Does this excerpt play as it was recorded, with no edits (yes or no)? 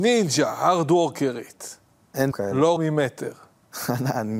no